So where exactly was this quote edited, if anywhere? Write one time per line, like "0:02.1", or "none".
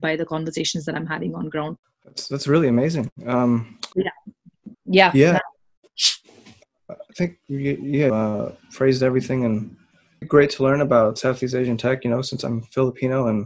0:01.8
0:03.9
0:04.7
0:07.1
0:08.1
0:10.2